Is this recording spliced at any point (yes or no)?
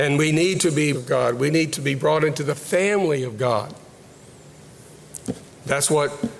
yes